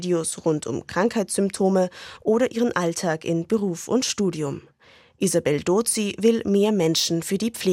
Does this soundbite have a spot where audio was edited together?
no; 0 cuts

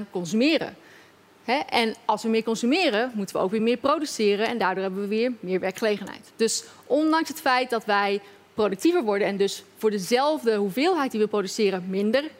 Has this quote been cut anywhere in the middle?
no; 0 cuts

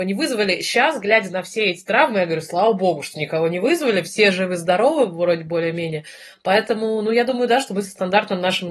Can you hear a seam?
no; 0 cuts

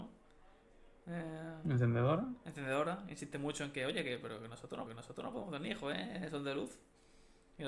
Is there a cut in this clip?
yes; 1 cut; at 4.9 s

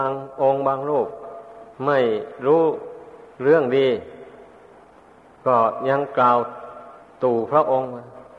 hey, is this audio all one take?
no; 3 cuts; at 1.7 s, 3.3 s, 7.0 s

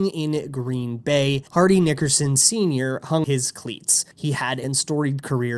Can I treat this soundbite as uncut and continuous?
no; 4 cuts; at 1.5 s, 3.2 s, 4.1 s, 4.6 s

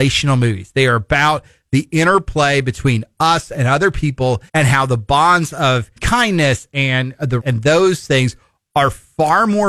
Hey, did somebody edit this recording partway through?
yes; 3 cuts; at 4.5 s, 6.0 s, 7.4 s

